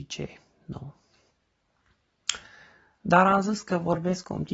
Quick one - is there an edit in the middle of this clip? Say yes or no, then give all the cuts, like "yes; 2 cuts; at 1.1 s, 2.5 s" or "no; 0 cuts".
no; 0 cuts